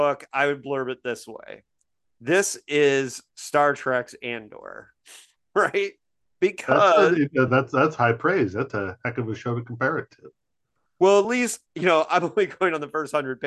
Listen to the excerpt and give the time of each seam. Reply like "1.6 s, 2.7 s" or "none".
none